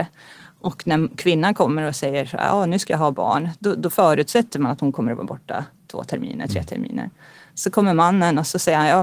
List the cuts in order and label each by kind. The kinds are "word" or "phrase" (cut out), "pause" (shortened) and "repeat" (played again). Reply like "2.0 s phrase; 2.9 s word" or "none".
none